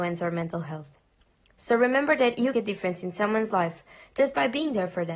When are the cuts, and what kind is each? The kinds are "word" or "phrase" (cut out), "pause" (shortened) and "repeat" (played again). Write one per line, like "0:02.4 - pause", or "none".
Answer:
0:02.5 - phrase